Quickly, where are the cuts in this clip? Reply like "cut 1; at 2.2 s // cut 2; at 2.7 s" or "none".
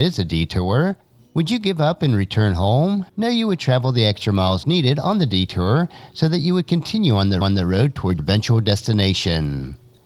cut 1; at 3.1 s // cut 2; at 7.4 s // cut 3; at 8.2 s